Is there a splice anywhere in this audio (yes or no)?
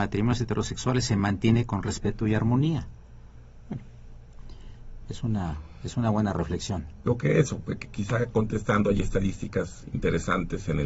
no